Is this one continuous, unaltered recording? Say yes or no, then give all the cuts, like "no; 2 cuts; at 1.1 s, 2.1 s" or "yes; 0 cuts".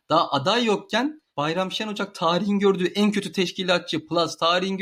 no; 1 cut; at 1.3 s